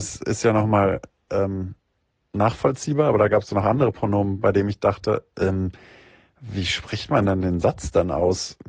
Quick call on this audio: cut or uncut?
uncut